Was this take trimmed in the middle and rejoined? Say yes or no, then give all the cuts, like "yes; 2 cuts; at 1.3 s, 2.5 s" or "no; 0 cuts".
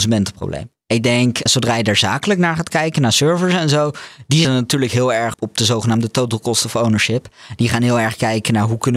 yes; 3 cuts; at 1.5 s, 4.4 s, 5.3 s